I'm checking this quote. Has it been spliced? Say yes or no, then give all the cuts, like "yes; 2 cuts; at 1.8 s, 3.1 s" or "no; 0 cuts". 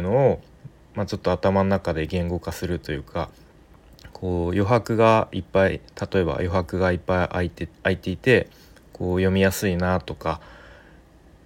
yes; 1 cut; at 7.7 s